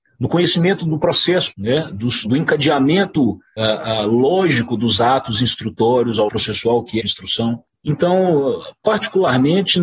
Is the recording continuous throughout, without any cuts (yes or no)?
no